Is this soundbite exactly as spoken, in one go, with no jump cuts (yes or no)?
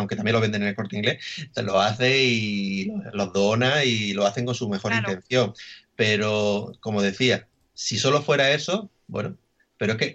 no